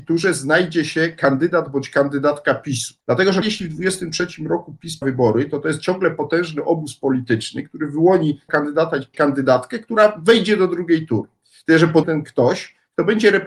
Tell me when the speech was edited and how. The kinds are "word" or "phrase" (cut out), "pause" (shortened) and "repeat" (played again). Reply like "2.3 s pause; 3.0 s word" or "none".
3.0 s pause; 3.4 s word; 5.0 s word; 8.5 s word; 9.1 s word; 12.0 s phrase